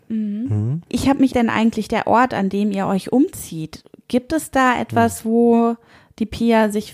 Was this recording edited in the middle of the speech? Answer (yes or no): yes